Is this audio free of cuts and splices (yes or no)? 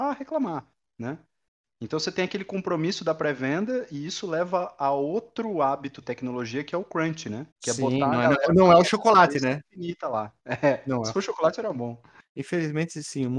no